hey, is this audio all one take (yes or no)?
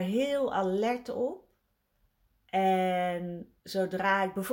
no